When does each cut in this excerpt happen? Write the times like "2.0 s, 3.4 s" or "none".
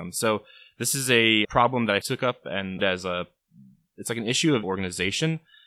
1.4 s, 2.0 s, 2.8 s, 4.6 s

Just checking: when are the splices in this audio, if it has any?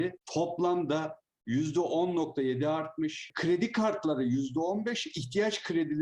none

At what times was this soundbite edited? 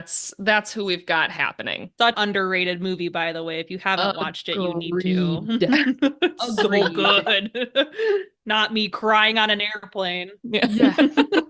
2.1 s

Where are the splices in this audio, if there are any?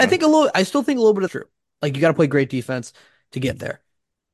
1.3 s

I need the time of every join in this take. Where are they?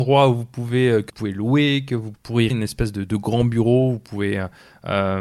1.1 s, 2.1 s, 2.5 s

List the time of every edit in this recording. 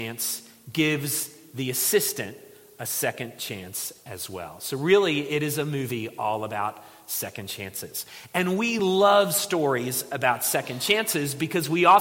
none

